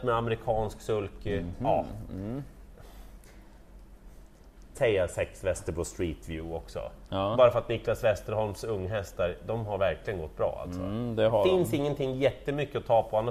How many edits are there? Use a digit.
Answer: 1